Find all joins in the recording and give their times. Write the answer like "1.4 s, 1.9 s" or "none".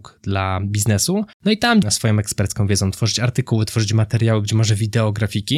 1.3 s, 1.8 s